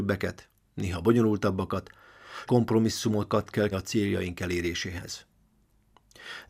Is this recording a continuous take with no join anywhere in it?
no; 2 cuts; at 2.5 s, 3.7 s

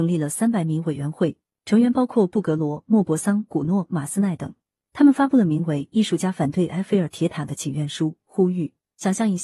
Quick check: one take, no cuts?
yes; 0 cuts

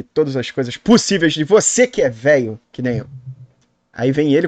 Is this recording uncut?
no; 1 cut; at 2.6 s

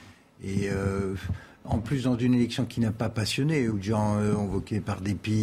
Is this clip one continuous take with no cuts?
no; 1 cut; at 3.7 s

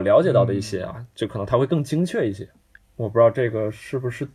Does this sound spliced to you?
no; 0 cuts

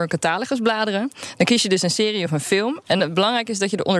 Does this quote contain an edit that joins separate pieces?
no; 0 cuts

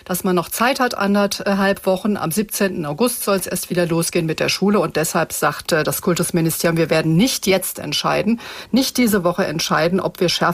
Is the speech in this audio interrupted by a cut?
no; 0 cuts

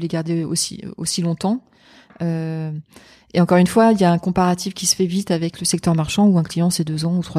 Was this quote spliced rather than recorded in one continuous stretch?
no; 0 cuts

